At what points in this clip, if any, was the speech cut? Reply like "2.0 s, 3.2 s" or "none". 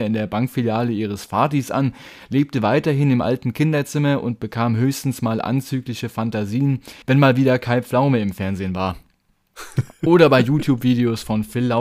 7.0 s

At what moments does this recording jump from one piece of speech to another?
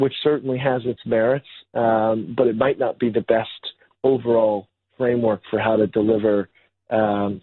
none

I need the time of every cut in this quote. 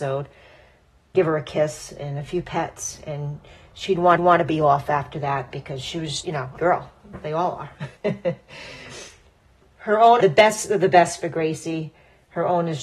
1.1 s, 4.2 s, 6.2 s, 6.6 s, 8.0 s, 10.2 s

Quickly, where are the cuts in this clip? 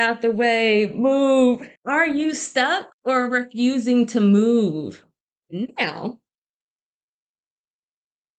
1.8 s, 2.9 s

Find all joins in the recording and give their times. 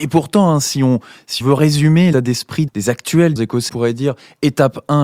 1.4 s, 2.1 s, 2.7 s, 3.4 s, 3.7 s

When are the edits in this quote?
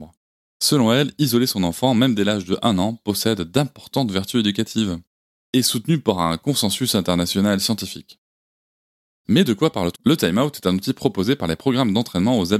5.5 s, 10.0 s

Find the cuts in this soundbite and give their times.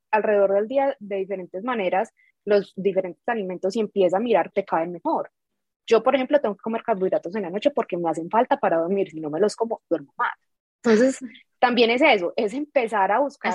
4.5 s

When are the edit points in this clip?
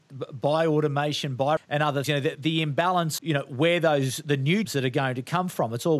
1.6 s, 2.0 s, 2.3 s, 3.2 s, 4.6 s

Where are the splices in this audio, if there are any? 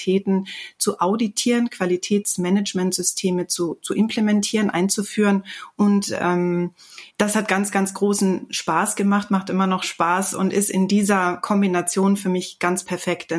7.1 s

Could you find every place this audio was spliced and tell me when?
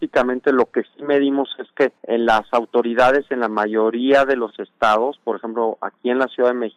2.0 s

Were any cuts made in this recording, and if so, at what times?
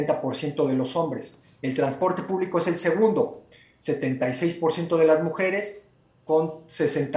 none

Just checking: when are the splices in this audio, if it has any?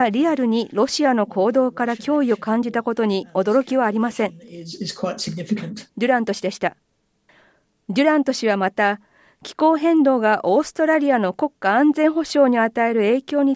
none

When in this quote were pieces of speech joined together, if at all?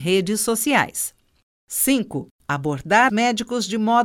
3.1 s

